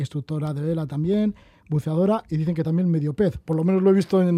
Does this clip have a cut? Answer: no; 0 cuts

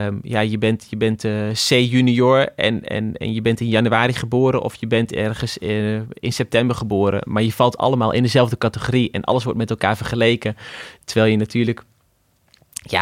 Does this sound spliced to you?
no; 0 cuts

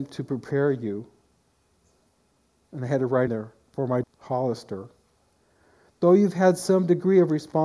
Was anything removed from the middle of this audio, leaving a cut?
yes; 2 cuts; at 3.3 s, 4.0 s

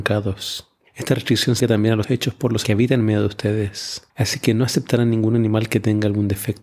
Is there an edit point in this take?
yes; 4 cuts; at 1.6 s, 2.0 s, 2.6 s, 4.1 s

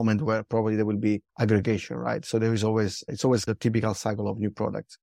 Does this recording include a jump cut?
yes; 1 cut; at 1.3 s

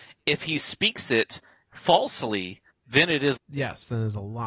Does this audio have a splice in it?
yes; 2 cuts; at 2.7 s, 3.4 s

